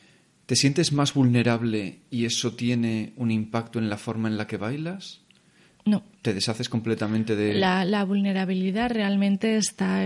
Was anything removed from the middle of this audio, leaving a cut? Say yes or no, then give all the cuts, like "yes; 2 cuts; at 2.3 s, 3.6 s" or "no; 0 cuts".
no; 0 cuts